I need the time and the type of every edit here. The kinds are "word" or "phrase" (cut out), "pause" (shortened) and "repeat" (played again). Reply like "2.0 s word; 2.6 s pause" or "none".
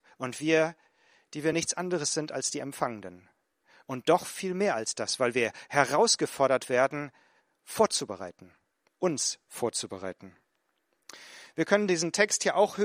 none